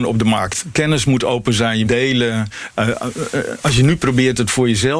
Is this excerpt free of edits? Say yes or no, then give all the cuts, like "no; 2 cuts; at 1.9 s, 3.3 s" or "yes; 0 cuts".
no; 1 cut; at 1.8 s